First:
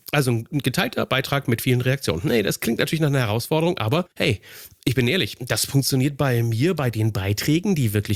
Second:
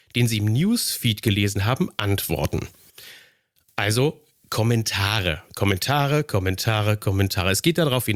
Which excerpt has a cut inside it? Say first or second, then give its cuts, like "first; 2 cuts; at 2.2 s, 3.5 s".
first; 1 cut; at 4.1 s